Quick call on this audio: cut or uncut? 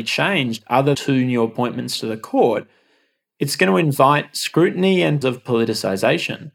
cut